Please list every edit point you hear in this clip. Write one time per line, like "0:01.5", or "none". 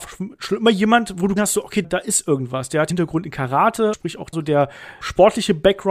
0:01.4
0:01.8
0:02.9
0:03.9
0:04.3
0:05.0